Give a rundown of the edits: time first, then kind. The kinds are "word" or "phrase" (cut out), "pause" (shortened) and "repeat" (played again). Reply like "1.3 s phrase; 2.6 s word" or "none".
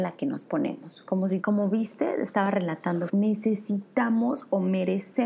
1.4 s word; 3.1 s word